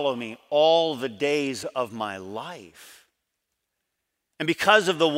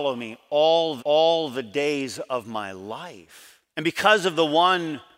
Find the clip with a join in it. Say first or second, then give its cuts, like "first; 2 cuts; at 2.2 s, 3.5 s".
second; 2 cuts; at 1.0 s, 3.7 s